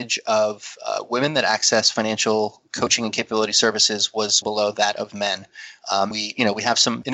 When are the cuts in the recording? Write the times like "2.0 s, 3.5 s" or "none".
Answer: 4.4 s, 6.1 s